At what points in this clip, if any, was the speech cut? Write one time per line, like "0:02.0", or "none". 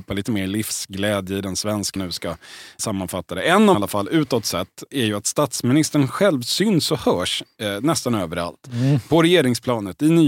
0:02.0
0:03.7